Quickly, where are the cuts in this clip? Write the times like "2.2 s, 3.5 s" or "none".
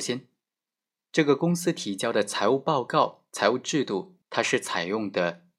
4.2 s